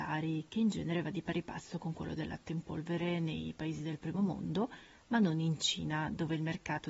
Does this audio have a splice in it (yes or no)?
no